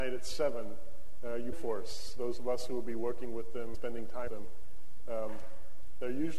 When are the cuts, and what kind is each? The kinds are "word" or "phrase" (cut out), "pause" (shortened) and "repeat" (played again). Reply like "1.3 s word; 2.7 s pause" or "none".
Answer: 1.5 s word; 3.7 s word; 4.3 s word